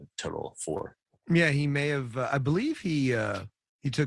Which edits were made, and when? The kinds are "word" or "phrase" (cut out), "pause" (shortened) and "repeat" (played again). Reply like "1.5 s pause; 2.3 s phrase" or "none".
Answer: none